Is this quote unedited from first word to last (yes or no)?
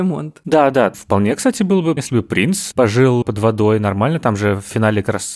no